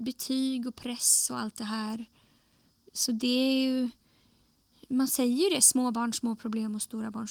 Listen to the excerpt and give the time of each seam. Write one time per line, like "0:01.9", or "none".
none